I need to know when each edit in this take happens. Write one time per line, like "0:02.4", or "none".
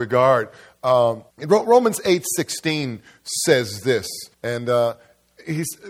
0:01.3
0:04.3